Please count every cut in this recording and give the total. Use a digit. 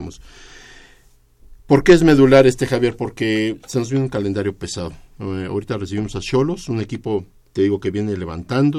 1